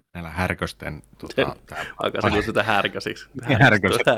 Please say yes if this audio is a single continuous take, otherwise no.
yes